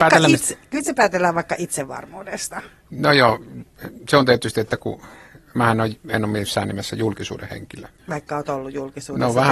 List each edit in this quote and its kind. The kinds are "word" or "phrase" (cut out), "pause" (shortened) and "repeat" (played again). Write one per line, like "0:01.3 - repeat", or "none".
0:08.0 - pause